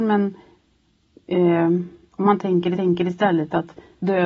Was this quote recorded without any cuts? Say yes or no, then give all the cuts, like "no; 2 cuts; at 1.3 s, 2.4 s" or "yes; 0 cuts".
no; 1 cut; at 2.8 s